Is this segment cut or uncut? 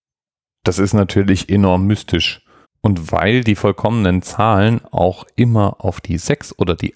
cut